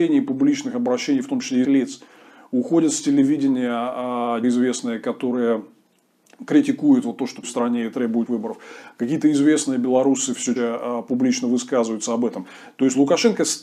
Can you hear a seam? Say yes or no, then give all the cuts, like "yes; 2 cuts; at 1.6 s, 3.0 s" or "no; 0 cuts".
yes; 5 cuts; at 1.6 s, 4.4 s, 7.4 s, 8.3 s, 10.6 s